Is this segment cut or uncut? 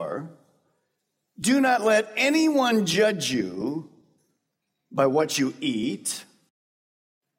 uncut